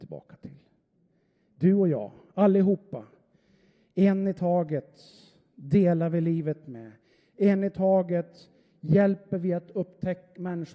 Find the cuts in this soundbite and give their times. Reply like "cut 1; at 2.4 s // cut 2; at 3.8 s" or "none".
none